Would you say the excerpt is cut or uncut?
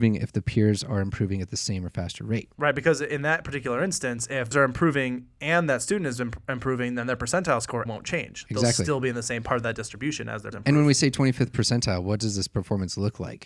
cut